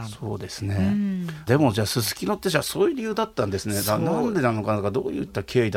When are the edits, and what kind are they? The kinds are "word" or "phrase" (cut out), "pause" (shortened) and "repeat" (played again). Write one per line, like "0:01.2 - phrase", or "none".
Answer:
0:01.5 - word